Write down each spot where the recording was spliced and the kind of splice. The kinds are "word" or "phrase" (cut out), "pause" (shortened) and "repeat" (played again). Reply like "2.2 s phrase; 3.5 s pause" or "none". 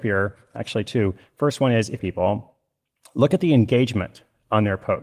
2.0 s phrase